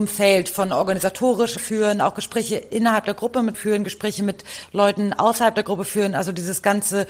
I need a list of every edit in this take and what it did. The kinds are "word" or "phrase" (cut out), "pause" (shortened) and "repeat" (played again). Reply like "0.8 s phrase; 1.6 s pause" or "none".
1.6 s phrase; 3.5 s word

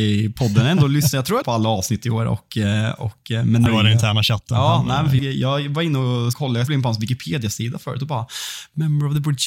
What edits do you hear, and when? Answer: 1.4 s word; 3.7 s word; 5.2 s word; 6.3 s word; 6.7 s word

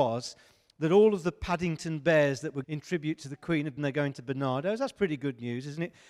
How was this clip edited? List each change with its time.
2.6 s word; 3.8 s phrase

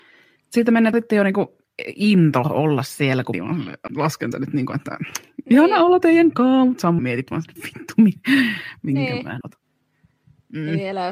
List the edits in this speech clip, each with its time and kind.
0.9 s word; 3.3 s word; 3.9 s word; 4.3 s word; 6.0 s word; 7.0 s word; 7.6 s word; 9.4 s word

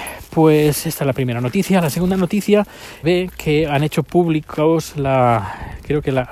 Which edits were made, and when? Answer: 3.0 s phrase

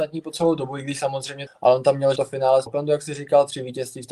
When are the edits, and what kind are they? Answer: 1.5 s phrase; 2.2 s word; 2.7 s word

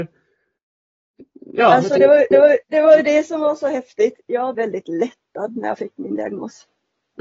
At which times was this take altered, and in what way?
2.3 s repeat; 4.5 s word

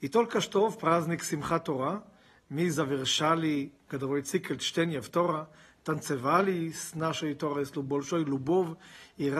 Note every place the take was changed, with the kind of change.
none

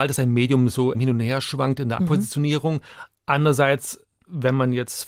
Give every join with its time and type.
0.9 s word; 2.0 s word

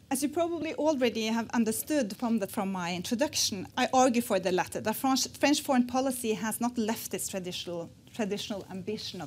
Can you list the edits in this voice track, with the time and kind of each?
2.2 s word; 2.5 s phrase; 3.7 s word

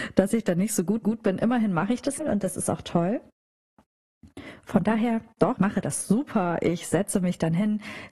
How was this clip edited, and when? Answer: 1.0 s repeat; 2.2 s word; 5.6 s word

